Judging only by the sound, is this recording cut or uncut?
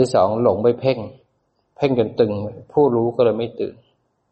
uncut